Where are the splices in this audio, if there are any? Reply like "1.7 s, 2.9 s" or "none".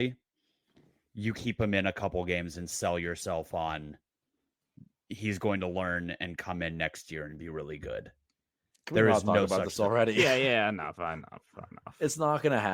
1.3 s, 10.9 s